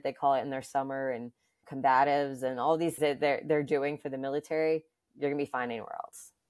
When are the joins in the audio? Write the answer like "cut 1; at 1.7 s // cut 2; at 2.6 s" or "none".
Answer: cut 1; at 1.6 s // cut 2; at 3.0 s // cut 3; at 5.1 s